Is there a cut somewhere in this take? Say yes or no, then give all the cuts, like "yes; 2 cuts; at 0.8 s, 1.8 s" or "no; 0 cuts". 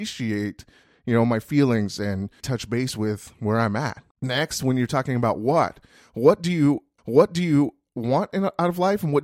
yes; 3 cuts; at 2.4 s, 4.1 s, 7.0 s